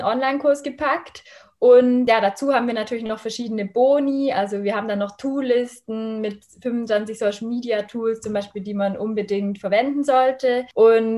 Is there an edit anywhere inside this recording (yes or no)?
no